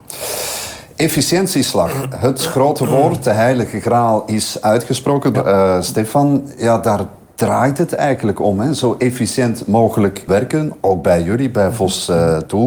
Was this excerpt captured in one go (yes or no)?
no